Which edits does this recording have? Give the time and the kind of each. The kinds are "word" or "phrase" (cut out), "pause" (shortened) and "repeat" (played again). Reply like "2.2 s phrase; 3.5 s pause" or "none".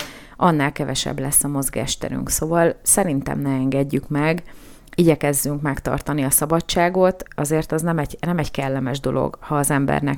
7.3 s word